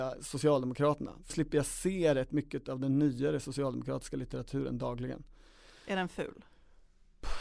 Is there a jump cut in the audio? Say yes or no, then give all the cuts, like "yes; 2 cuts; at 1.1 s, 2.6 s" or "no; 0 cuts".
yes; 1 cut; at 1.3 s